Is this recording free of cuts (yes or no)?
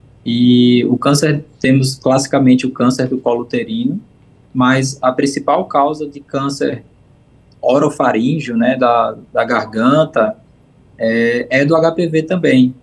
yes